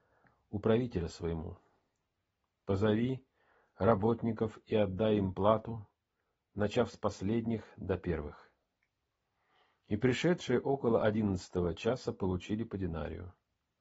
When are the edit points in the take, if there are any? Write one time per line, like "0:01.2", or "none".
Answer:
none